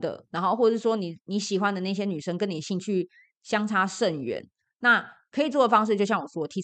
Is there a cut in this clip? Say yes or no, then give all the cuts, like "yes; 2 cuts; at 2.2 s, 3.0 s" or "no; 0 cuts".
no; 0 cuts